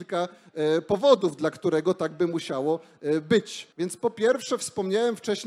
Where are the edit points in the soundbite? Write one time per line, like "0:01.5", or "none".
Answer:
0:03.7